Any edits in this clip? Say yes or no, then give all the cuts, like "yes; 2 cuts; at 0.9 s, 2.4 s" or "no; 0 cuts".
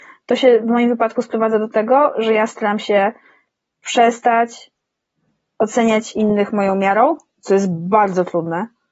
no; 0 cuts